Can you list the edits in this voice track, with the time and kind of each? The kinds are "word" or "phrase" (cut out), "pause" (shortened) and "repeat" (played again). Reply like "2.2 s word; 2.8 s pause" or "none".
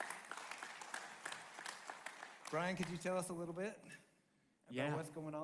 none